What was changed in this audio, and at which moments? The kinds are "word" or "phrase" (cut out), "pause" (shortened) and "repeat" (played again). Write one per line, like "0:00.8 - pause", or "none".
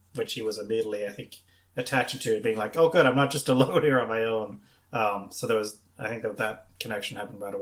none